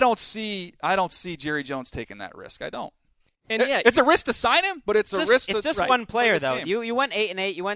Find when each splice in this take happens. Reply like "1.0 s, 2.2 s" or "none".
none